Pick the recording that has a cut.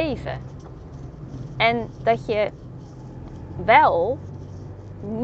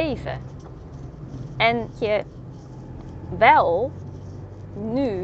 second; 1 cut; at 2.0 s

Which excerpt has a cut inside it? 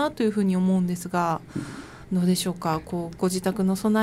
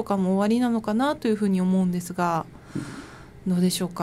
first; 2 cuts; at 1.5 s, 2.0 s

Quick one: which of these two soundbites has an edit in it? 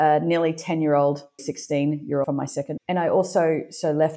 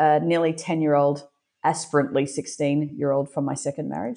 first; 3 cuts; at 1.4 s, 2.2 s, 2.8 s

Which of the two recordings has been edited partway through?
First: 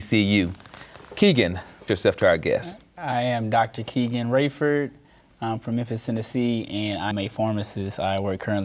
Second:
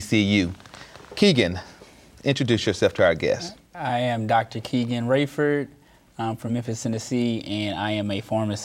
first; 2 cuts; at 1.9 s, 7.1 s

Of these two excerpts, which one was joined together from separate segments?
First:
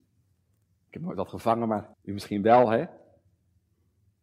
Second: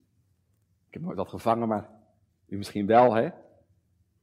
first; 1 cut; at 1.9 s

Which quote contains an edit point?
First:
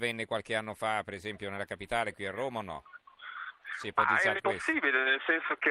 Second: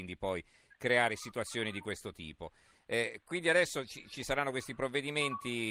first; 1 cut; at 4.4 s

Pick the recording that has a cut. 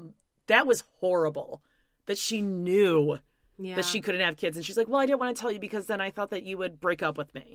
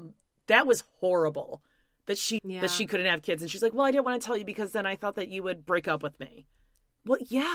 second; 1 cut; at 2.4 s

